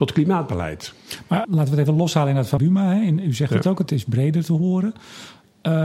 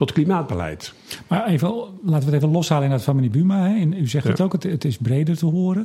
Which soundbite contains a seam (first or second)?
first